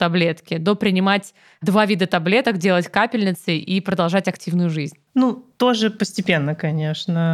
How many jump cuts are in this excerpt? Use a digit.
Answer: 0